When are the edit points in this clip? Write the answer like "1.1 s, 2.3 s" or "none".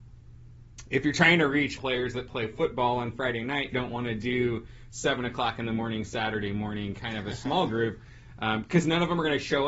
1.8 s, 3.7 s